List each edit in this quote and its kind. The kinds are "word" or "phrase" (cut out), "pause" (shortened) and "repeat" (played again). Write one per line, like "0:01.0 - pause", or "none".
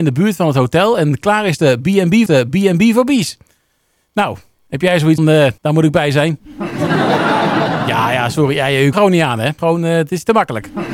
0:02.3 - repeat
0:05.2 - word
0:05.6 - pause
0:08.9 - phrase
0:09.6 - word